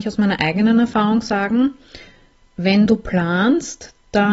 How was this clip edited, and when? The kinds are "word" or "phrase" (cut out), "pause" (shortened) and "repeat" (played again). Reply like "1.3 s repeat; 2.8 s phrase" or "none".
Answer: none